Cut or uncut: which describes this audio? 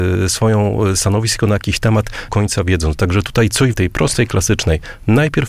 cut